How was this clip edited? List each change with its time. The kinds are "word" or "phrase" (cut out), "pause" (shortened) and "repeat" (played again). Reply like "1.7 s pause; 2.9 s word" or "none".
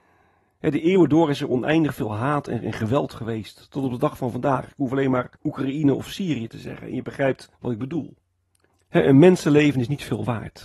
5.4 s pause; 7.6 s pause; 8.7 s pause